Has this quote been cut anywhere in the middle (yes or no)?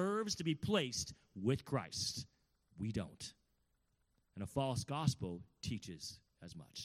no